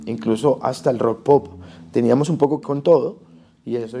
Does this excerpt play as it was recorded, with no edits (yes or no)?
no